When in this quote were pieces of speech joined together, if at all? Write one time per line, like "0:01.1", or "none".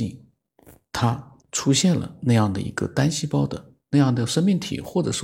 0:01.4
0:03.8